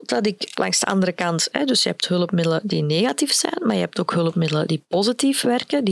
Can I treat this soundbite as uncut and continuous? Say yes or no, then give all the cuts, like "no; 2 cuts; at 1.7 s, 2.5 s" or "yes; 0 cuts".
yes; 0 cuts